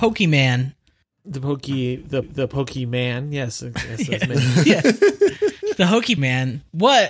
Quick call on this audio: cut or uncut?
cut